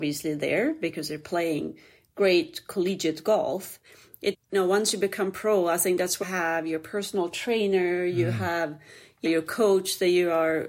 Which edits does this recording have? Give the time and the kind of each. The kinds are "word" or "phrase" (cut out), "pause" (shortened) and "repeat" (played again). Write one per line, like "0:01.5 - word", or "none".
0:04.3 - word
0:06.2 - word
0:09.2 - word